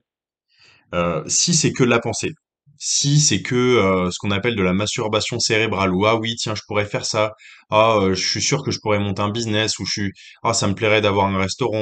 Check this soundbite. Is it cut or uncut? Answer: uncut